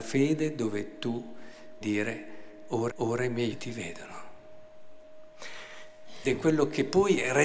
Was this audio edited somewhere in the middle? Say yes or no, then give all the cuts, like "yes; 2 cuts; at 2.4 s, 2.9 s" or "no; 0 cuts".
yes; 4 cuts; at 1.8 s, 2.9 s, 3.5 s, 6.2 s